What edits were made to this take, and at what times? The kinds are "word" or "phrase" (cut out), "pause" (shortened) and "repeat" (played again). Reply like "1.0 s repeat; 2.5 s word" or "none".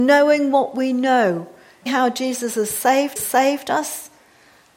1.9 s word; 3.2 s repeat